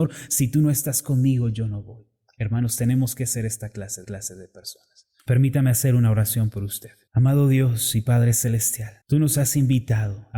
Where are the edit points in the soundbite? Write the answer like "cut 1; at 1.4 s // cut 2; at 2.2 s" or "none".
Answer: cut 1; at 4.0 s // cut 2; at 7.1 s // cut 3; at 9.0 s